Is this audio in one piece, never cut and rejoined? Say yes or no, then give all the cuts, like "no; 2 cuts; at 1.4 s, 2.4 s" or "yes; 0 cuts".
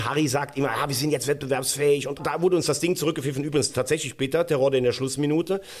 no; 1 cut; at 2.2 s